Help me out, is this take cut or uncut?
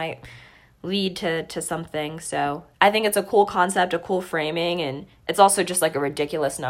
cut